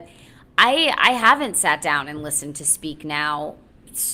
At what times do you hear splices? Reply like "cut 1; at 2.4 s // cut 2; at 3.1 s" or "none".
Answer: none